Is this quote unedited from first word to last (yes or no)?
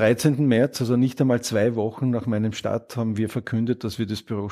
yes